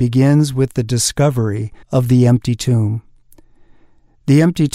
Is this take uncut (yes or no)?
no